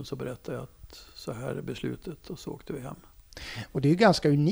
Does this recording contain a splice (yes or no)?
no